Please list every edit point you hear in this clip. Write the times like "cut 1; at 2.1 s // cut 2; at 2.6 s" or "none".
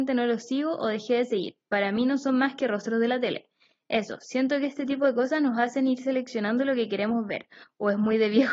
none